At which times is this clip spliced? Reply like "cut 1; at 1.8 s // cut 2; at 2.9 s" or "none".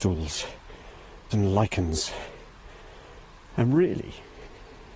cut 1; at 1.3 s